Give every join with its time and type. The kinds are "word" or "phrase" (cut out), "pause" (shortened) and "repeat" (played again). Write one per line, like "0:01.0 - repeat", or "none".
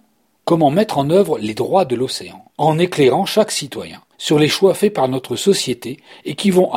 0:02.5 - pause
0:04.1 - pause

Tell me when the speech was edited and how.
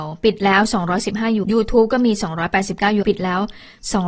0:01.4 - word
0:03.0 - word

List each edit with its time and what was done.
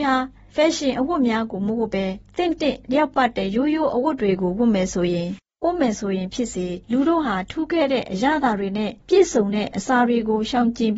0:02.8 - pause
0:06.8 - pause
0:09.0 - pause

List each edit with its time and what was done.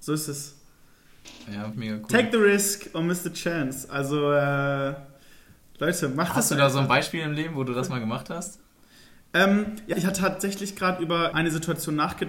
0:01.7 - phrase
0:09.9 - word
0:11.3 - word

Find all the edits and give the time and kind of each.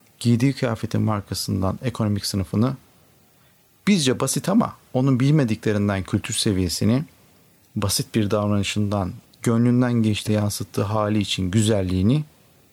0:09.2 - word
0:10.3 - word

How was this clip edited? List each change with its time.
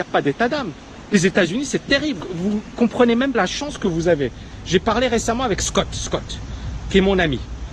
0:03.3 - word

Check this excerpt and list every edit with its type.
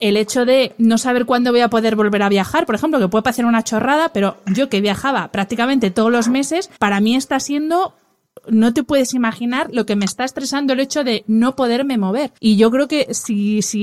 0:06.8 - pause
0:12.4 - pause

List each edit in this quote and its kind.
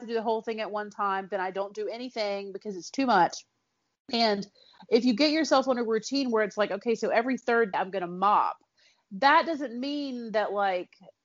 0:07.7 - word

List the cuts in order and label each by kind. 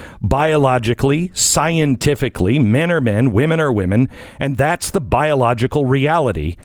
none

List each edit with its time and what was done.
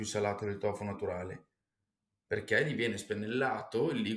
none

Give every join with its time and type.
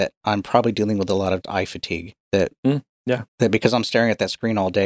0:01.4 - word
0:02.2 - pause
0:03.3 - pause

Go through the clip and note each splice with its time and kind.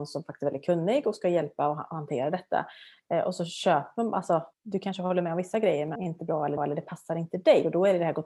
0:04.5 - pause
0:06.0 - word
0:06.6 - repeat

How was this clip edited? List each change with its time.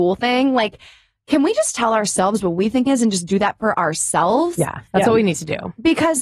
0:02.9 - phrase
0:04.9 - pause

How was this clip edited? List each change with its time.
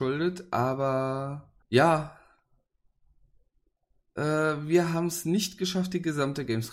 0:01.6 - pause

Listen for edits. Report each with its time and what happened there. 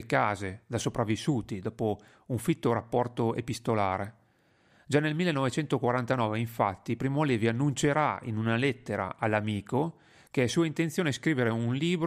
none

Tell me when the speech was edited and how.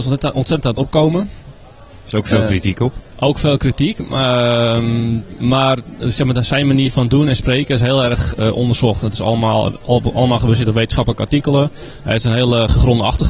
none

